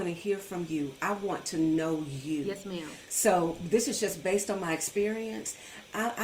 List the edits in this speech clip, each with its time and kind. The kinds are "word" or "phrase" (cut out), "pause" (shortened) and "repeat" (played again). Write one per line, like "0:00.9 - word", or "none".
none